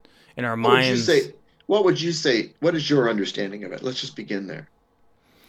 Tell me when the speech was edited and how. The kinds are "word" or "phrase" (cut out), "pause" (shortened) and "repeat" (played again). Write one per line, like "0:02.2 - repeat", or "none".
none